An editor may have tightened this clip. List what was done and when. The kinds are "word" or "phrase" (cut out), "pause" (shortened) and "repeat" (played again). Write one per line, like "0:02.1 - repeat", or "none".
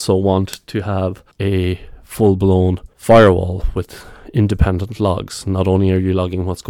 0:01.3 - pause
0:02.9 - pause

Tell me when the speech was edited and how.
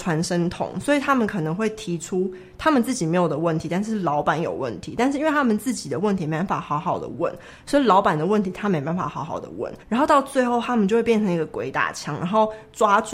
0:09.8 - pause

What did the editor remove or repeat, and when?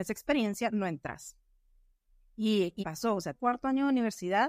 0:02.8 - word
0:03.3 - word

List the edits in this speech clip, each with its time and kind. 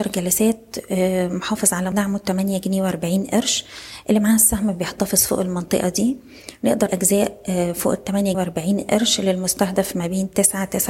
0:01.9 - word
0:06.9 - word
0:08.3 - word

